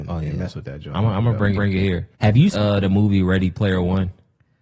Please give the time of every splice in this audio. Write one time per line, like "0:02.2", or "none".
0:01.5
0:02.1
0:02.5